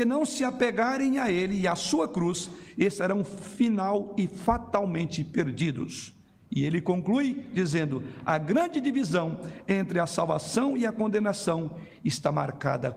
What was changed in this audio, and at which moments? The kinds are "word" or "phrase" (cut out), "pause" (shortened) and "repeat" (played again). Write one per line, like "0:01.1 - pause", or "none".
none